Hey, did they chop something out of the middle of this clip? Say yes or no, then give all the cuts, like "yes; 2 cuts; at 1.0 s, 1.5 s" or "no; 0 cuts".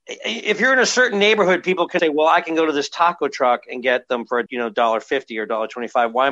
yes; 2 cuts; at 2.0 s, 4.5 s